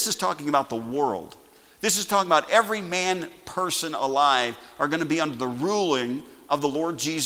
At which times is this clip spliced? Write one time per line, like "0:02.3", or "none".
none